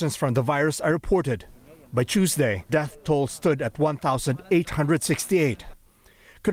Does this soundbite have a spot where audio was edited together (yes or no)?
yes